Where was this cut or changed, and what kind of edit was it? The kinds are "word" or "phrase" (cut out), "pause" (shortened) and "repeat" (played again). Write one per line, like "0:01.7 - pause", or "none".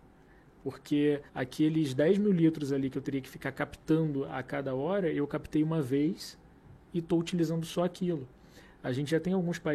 0:01.3 - pause